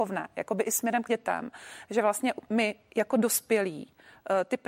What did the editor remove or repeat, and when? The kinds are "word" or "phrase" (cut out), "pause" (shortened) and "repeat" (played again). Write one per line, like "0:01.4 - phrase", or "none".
0:01.1 - word